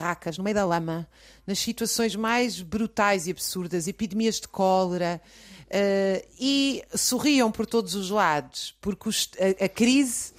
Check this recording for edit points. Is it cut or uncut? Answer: uncut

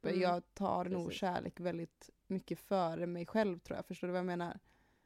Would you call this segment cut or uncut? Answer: uncut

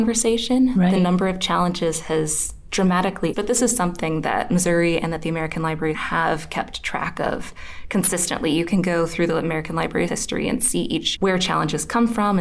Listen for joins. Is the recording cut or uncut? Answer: cut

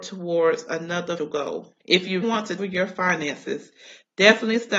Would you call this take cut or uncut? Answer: cut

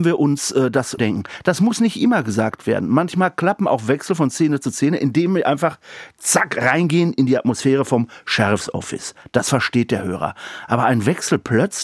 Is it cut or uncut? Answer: cut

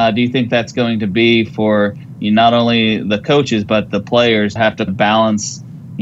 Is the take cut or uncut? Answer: cut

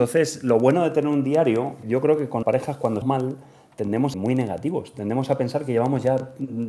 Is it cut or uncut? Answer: cut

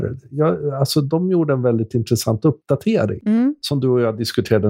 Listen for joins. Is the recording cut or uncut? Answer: uncut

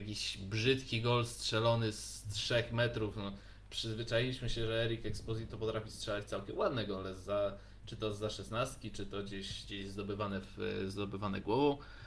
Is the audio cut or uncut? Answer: cut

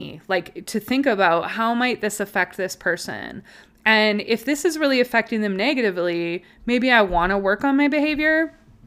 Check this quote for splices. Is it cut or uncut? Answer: uncut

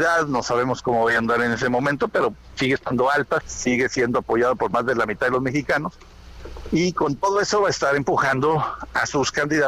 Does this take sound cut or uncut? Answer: cut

